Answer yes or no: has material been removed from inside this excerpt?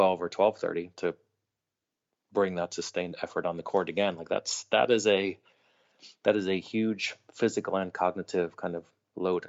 no